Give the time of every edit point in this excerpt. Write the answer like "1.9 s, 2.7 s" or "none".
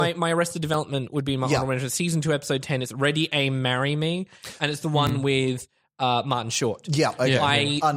none